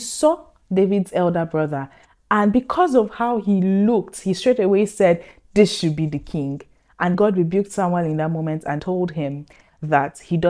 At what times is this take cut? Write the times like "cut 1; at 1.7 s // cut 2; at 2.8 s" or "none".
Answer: cut 1; at 7.1 s // cut 2; at 8.8 s